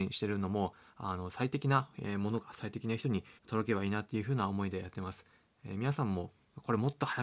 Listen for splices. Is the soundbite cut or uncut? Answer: cut